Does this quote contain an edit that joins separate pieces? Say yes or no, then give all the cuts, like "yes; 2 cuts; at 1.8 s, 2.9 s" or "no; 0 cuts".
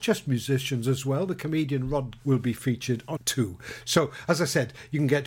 yes; 2 cuts; at 2.2 s, 3.2 s